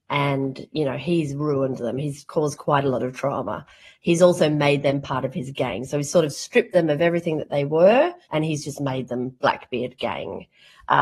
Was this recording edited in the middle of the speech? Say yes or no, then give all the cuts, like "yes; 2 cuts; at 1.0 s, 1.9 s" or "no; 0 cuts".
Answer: yes; 1 cut; at 8.2 s